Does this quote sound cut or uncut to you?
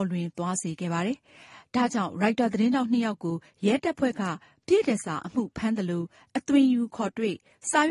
uncut